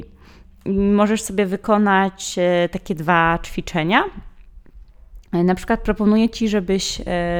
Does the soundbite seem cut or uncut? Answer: uncut